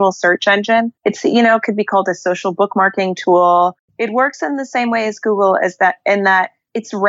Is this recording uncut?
no; 1 cut; at 1.0 s

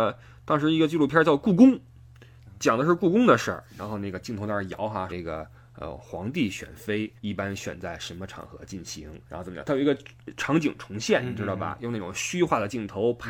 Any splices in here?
yes; 3 cuts; at 5.1 s, 7.2 s, 9.3 s

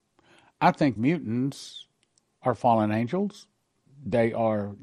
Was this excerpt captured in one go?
no; 1 cut; at 1.0 s

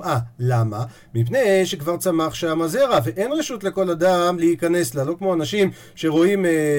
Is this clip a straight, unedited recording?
yes; 0 cuts

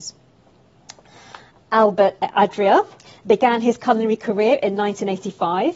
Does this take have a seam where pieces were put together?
no; 0 cuts

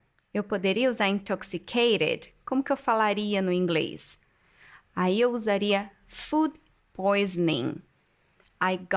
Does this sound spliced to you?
no; 0 cuts

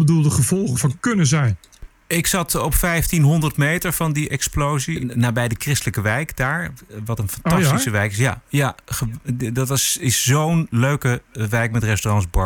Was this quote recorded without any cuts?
yes; 0 cuts

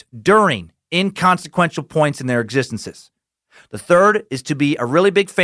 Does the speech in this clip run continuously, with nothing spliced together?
yes; 0 cuts

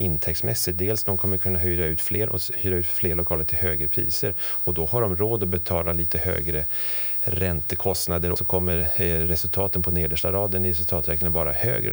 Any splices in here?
yes; 2 cuts; at 2.3 s, 8.4 s

